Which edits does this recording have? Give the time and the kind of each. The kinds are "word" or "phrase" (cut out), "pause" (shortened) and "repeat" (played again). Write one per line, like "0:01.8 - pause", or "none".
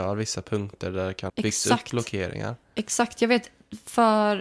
0:01.3 - word